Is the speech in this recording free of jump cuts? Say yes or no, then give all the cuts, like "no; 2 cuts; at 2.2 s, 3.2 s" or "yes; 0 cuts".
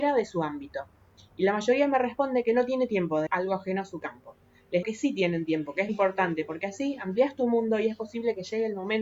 no; 3 cuts; at 3.3 s, 4.8 s, 5.9 s